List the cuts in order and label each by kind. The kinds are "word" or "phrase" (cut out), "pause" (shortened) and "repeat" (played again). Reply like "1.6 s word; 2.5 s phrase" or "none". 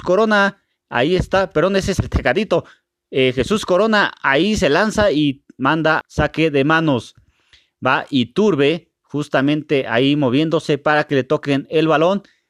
6.0 s word